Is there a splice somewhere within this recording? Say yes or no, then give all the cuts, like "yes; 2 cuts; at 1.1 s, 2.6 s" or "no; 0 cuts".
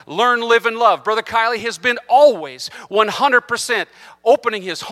no; 0 cuts